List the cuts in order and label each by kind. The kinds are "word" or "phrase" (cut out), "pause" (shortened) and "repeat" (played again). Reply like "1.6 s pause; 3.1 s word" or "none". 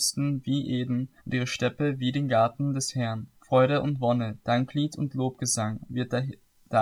1.2 s pause; 3.4 s pause